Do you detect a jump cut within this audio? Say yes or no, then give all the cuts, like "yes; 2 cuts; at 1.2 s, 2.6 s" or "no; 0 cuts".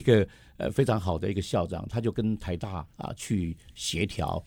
yes; 1 cut; at 2.9 s